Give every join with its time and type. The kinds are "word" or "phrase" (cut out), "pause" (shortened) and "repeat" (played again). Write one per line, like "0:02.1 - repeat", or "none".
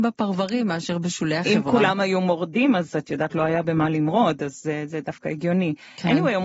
none